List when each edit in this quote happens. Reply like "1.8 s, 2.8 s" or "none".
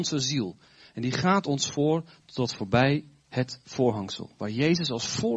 none

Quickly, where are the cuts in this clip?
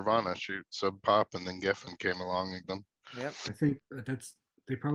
2.6 s, 3.8 s

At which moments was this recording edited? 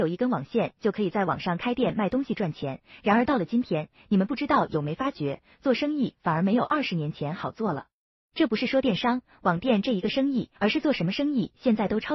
10.6 s

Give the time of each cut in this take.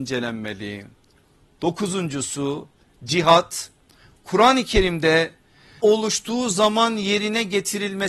5.8 s

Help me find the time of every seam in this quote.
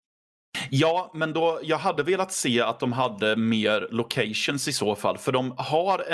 none

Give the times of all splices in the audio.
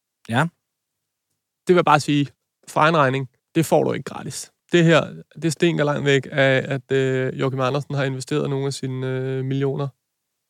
2.3 s, 3.4 s, 4.6 s

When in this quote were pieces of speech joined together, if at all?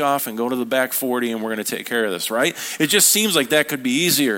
none

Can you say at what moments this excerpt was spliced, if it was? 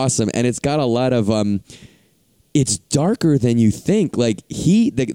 none

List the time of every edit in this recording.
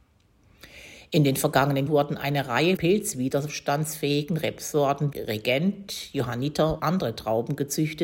1.9 s, 2.8 s, 5.1 s, 6.8 s

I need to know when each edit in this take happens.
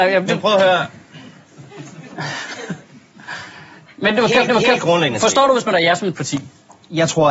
4.5 s, 5.7 s, 6.1 s

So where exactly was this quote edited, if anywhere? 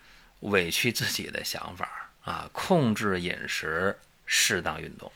2.2 s

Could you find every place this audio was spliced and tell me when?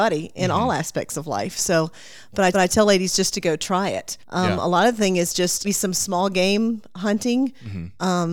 2.5 s, 4.2 s, 5.6 s

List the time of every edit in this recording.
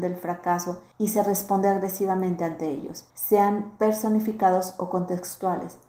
0.9 s, 3.1 s

